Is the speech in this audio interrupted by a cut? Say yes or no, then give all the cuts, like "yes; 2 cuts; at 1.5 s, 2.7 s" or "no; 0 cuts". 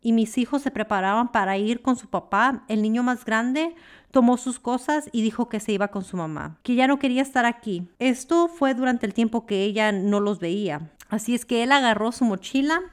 no; 0 cuts